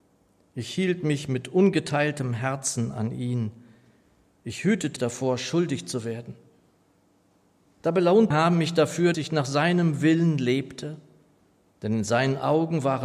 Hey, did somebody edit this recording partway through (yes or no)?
yes